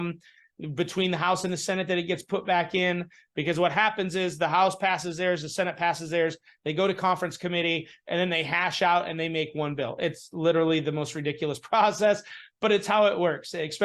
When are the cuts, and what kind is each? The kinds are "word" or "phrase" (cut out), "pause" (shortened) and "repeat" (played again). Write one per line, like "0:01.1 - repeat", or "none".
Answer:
none